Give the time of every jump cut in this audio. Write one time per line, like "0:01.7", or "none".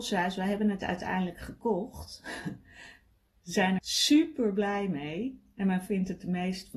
0:03.8
0:05.9